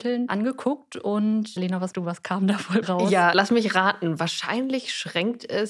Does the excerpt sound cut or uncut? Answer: cut